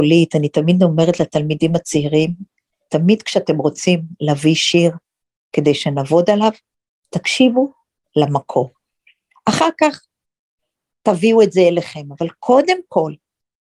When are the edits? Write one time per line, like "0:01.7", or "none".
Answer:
none